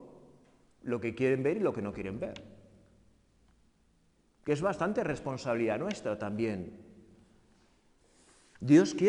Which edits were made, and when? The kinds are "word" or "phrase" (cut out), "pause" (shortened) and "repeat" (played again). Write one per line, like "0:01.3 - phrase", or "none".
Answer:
none